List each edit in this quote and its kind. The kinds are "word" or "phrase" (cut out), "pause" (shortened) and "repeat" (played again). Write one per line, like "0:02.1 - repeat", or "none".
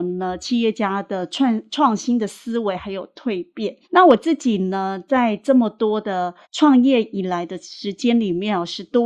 0:03.8 - pause
0:06.4 - pause